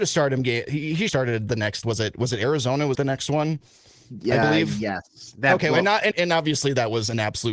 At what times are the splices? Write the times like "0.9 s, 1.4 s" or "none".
1.1 s, 1.8 s, 2.9 s, 6.1 s